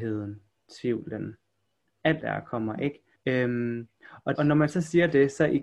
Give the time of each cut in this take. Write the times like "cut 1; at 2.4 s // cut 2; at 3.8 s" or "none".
cut 1; at 2.2 s // cut 2; at 3.2 s // cut 3; at 4.4 s